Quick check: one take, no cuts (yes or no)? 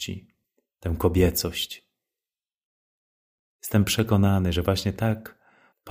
yes